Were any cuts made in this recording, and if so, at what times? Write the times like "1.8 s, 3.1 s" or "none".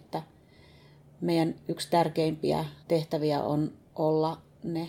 2.8 s